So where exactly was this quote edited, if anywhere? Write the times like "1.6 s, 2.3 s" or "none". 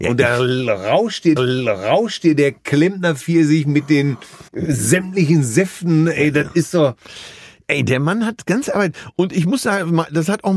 1.4 s, 4.5 s

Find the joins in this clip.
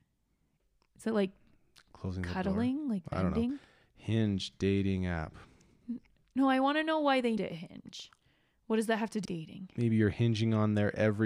7.4 s, 9.3 s

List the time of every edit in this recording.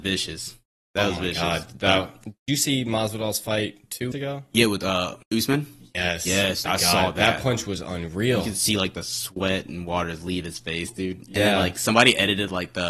4.1 s, 5.2 s, 6.7 s

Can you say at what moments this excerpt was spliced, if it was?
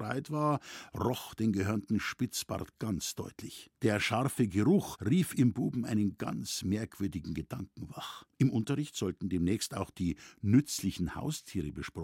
3.7 s, 8.3 s

